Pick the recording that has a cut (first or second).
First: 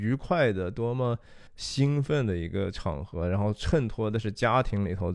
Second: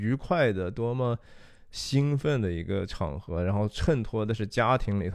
first